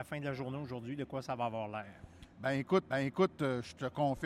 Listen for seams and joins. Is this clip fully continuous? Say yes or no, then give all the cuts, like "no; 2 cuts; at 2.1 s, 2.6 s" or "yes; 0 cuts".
no; 1 cut; at 2.9 s